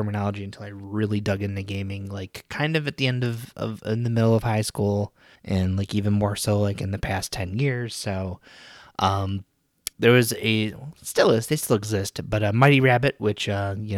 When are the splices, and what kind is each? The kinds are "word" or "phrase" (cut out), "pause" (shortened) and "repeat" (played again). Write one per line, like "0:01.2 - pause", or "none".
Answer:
0:05.3 - pause
0:09.9 - pause